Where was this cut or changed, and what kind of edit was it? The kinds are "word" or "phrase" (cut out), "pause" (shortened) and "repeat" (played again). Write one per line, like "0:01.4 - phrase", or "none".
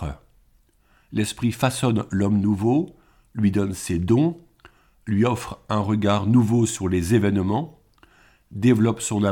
none